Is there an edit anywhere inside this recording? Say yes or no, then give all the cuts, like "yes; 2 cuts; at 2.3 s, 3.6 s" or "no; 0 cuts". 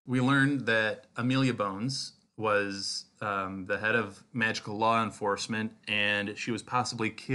no; 0 cuts